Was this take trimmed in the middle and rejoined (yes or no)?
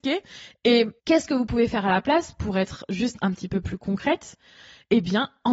yes